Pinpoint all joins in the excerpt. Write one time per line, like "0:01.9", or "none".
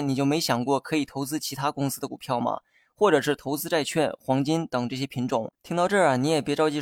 0:05.6

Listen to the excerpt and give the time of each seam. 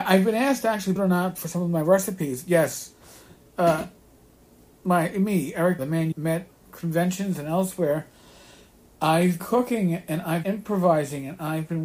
0:01.0
0:05.8
0:06.1
0:06.5
0:09.4
0:10.4

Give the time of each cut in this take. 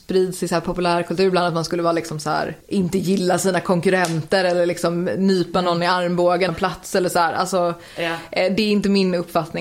0:02.6
0:06.5

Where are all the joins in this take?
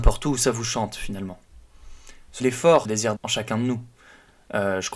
0:02.4
0:02.8
0:03.2

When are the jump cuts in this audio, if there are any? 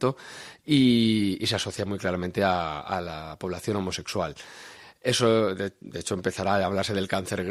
none

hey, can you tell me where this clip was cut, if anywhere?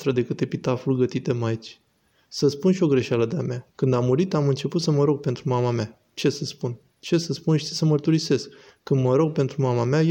0:03.7

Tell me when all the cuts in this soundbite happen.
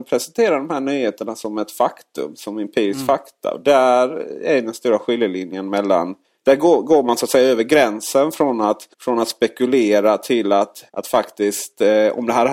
0:06.2
0:08.9
0:10.9

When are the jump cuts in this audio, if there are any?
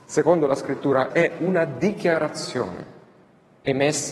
0:01.1

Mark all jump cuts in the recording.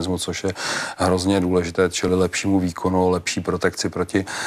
none

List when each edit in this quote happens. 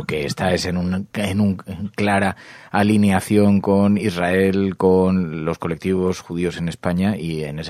none

